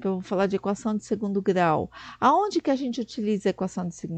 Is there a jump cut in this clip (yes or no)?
no